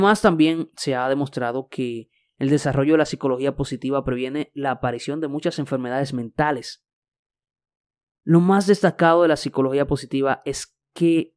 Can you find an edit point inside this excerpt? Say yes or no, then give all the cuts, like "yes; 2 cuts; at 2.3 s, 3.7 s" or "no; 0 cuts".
no; 0 cuts